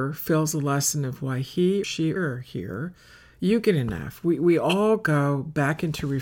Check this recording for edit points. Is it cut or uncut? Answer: cut